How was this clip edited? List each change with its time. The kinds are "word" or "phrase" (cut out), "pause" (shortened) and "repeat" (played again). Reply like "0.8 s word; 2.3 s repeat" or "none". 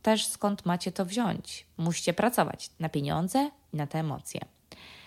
none

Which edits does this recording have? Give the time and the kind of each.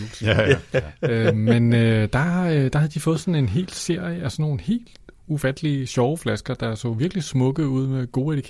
none

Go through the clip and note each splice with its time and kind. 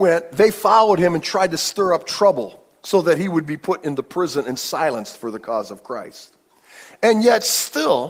none

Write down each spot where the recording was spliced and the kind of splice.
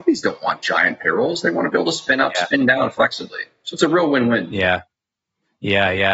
none

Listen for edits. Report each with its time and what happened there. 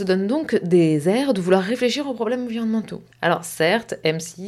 3.1 s pause

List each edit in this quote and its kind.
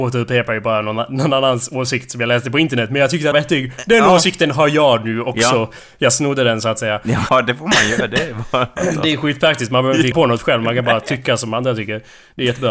3.3 s phrase; 7.3 s word; 10.1 s word

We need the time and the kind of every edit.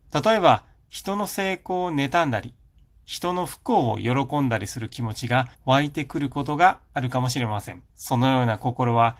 5.5 s pause; 7.9 s pause

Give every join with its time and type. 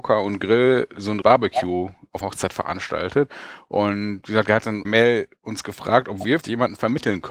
1.2 s word; 2.2 s word; 4.8 s word; 6.4 s word

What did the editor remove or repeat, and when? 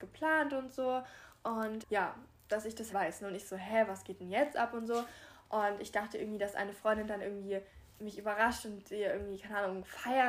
1.8 s word; 2.9 s word

